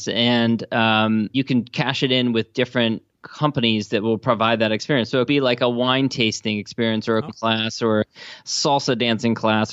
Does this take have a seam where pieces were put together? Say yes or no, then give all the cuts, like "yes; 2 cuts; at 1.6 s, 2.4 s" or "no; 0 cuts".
yes; 3 cuts; at 1.3 s, 5.3 s, 7.3 s